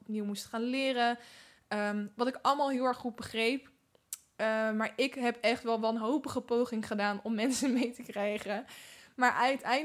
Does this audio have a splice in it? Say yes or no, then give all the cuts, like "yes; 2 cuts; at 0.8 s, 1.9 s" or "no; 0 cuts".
no; 0 cuts